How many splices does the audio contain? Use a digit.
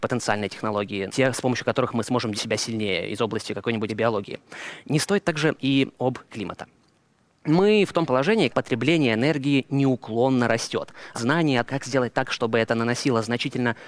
8